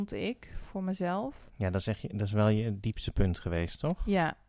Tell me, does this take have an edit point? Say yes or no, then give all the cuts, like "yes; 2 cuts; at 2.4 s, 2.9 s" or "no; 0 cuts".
no; 0 cuts